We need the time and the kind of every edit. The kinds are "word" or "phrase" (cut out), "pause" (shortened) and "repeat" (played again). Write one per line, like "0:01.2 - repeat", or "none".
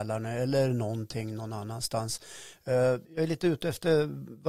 0:03.0 - pause